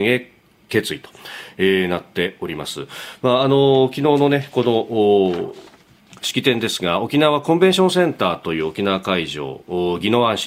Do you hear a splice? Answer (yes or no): no